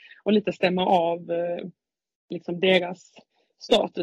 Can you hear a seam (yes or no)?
no